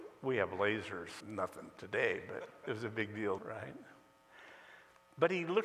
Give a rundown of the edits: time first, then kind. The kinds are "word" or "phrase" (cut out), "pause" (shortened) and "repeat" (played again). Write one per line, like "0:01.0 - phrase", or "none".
0:01.2 - word
0:03.4 - word